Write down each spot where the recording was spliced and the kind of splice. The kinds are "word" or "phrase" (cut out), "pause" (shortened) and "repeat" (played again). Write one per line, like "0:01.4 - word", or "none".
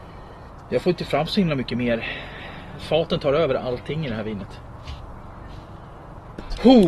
none